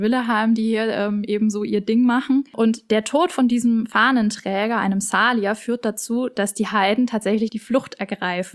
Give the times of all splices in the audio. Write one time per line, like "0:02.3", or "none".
none